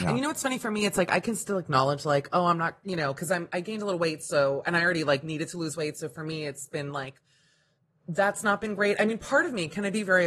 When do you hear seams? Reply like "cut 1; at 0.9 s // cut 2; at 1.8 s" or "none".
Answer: none